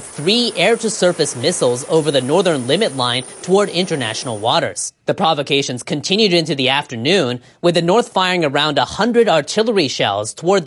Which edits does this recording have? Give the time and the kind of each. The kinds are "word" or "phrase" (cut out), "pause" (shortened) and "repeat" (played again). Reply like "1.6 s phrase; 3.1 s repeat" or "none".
5.0 s pause

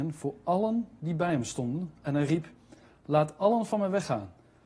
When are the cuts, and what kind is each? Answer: none

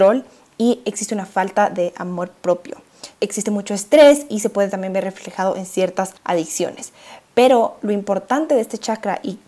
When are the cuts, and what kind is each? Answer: 3.1 s pause; 6.2 s pause

